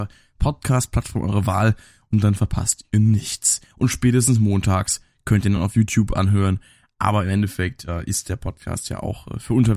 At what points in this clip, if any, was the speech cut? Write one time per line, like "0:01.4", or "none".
none

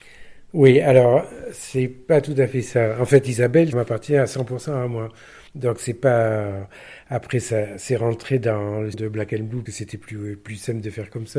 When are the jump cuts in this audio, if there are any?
0:03.7
0:05.5
0:08.9
0:09.7

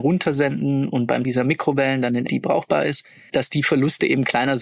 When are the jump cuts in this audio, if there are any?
0:01.2
0:02.3
0:03.3

